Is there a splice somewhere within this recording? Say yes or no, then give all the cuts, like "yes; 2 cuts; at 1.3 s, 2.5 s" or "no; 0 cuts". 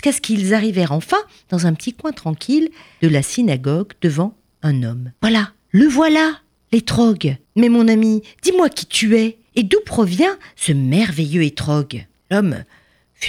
yes; 3 cuts; at 5.2 s, 7.4 s, 9.5 s